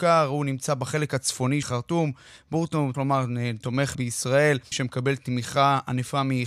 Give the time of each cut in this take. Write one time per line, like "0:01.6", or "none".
0:01.6
0:02.9
0:03.9
0:04.7